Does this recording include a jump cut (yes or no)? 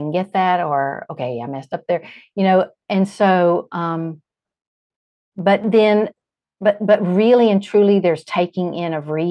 no